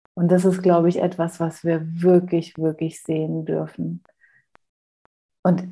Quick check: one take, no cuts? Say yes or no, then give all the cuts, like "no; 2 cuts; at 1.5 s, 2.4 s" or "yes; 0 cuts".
yes; 0 cuts